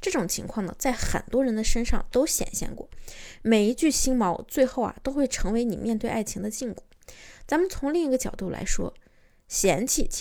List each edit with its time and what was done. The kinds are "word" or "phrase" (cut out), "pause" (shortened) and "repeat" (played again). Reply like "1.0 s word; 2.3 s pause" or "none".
none